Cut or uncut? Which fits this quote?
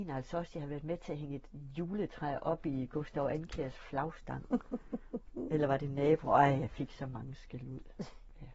uncut